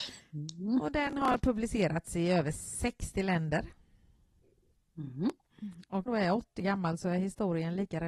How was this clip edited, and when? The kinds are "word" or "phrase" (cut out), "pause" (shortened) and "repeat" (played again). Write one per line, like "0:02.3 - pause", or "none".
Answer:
0:06.1 - phrase
0:06.6 - word

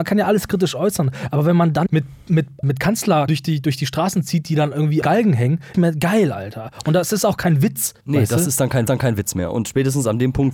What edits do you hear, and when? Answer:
0:01.9 - word
0:02.6 - word
0:03.3 - word
0:05.0 - word
0:05.7 - phrase
0:08.0 - pause
0:08.9 - repeat

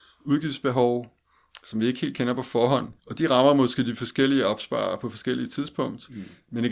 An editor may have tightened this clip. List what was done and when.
0:03.0 - pause

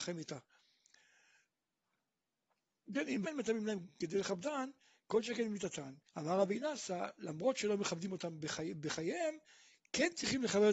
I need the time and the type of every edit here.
0:03.2 - word
0:06.1 - pause

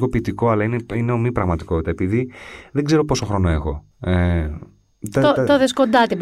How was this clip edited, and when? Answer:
0:03.9 - pause

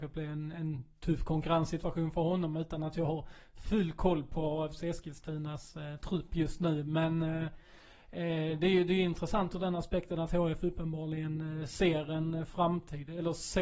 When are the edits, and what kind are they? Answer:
none

